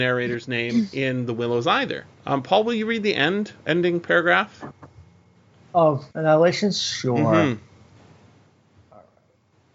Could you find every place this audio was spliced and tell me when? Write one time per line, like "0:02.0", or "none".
0:02.1
0:03.6
0:06.1